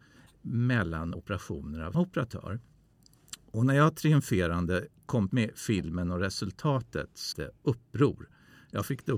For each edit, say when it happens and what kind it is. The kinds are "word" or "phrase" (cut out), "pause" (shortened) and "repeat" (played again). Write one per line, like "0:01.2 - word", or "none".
0:01.1 - word
0:01.9 - word
0:05.3 - word
0:07.3 - word